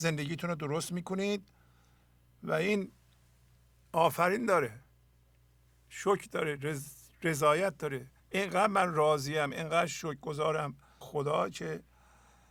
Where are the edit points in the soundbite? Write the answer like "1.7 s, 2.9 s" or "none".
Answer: 8.2 s, 11.0 s